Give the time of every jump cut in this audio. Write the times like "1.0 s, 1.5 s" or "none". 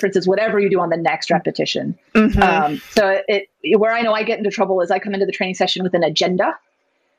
3.5 s